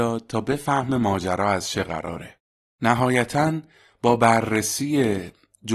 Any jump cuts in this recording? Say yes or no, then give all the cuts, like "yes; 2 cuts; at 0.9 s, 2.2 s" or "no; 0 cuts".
no; 0 cuts